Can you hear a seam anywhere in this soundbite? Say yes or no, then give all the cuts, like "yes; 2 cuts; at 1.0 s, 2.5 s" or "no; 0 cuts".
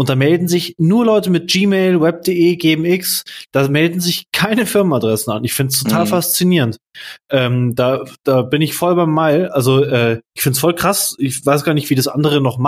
no; 0 cuts